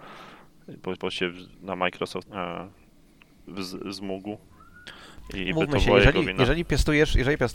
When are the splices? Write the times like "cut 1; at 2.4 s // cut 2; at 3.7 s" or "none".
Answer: cut 1; at 1.0 s // cut 2; at 1.5 s // cut 3; at 2.3 s // cut 4; at 5.5 s